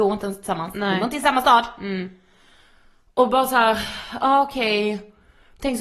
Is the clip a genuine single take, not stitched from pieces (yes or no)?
yes